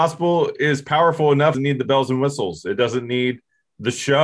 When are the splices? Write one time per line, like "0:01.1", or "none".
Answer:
0:01.5